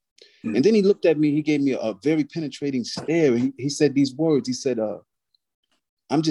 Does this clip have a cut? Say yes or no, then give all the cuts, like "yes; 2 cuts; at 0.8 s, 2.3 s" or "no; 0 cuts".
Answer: no; 0 cuts